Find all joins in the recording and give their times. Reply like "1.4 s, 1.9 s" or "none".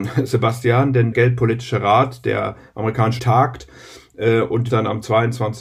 1.1 s, 3.2 s, 4.7 s